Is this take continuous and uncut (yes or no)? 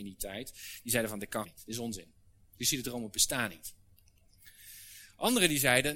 no